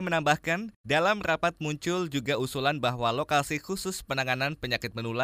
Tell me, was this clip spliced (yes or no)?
no